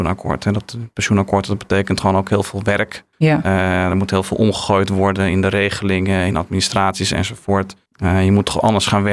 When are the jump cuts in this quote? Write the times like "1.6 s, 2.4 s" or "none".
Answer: 3.1 s, 7.9 s